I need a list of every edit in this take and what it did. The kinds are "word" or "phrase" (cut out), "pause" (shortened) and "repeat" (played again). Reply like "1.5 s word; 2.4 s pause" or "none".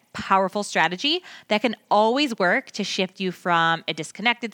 none